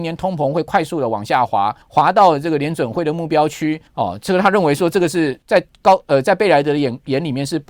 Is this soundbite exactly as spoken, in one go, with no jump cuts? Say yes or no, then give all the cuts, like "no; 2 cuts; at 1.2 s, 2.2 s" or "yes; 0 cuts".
no; 3 cuts; at 1.8 s, 3.9 s, 5.4 s